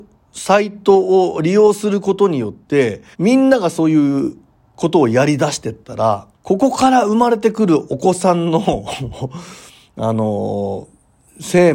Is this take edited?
yes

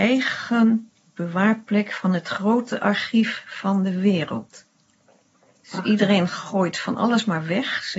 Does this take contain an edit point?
no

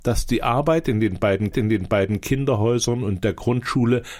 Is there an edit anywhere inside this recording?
yes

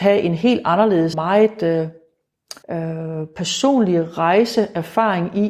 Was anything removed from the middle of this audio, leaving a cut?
yes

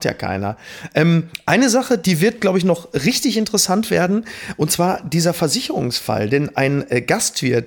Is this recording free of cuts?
yes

